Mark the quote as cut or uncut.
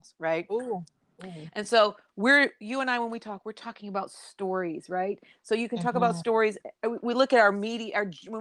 uncut